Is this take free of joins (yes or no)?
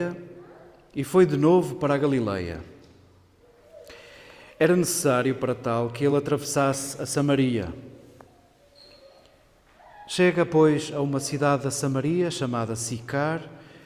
yes